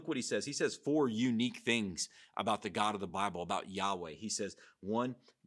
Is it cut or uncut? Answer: uncut